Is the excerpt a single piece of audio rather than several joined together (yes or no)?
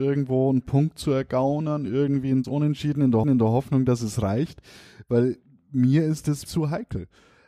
no